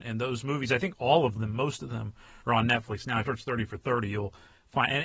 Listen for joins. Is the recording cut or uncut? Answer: cut